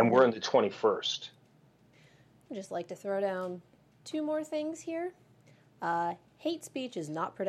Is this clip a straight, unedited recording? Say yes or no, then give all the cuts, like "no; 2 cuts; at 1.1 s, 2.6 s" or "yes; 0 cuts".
no; 1 cut; at 1.9 s